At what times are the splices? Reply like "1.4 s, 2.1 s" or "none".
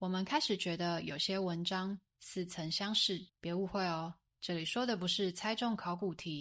3.3 s

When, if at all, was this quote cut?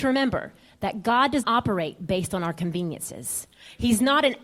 1.4 s

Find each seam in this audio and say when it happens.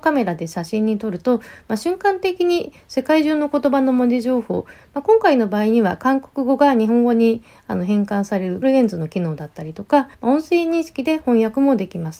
8.6 s, 10.1 s

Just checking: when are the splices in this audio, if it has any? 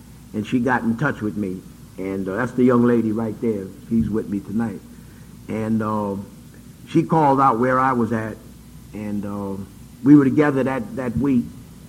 6.8 s, 9.9 s

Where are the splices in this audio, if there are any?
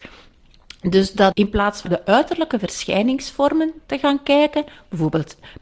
1.3 s, 1.9 s

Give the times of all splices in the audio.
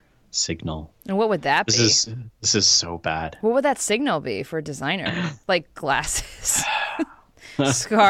none

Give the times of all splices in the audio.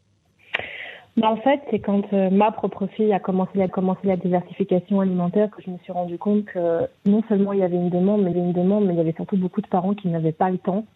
3.7 s, 7.0 s, 8.3 s

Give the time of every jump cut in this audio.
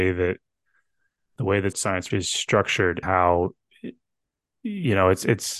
1.7 s, 2.1 s, 3.0 s

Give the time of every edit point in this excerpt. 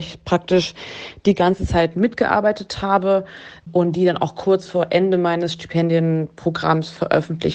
none

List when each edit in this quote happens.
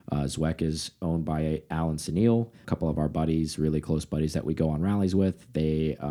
2.6 s

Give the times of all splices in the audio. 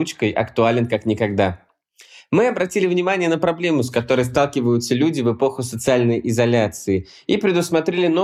none

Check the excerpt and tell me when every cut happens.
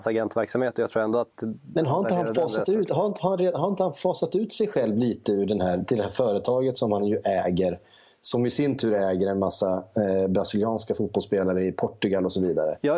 none

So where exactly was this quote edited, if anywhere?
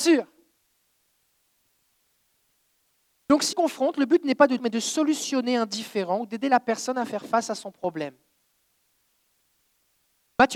3.5 s, 4.6 s

